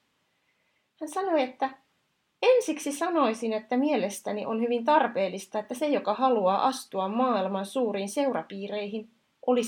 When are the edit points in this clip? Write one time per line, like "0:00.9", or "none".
none